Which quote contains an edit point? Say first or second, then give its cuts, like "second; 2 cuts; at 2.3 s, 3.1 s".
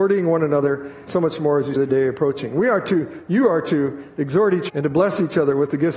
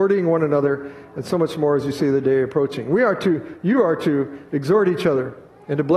first; 3 cuts; at 1.1 s, 1.8 s, 4.7 s